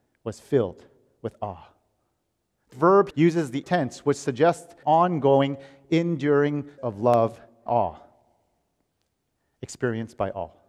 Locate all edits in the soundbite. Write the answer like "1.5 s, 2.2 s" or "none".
2.7 s, 3.1 s, 3.6 s, 4.8 s, 6.8 s, 7.7 s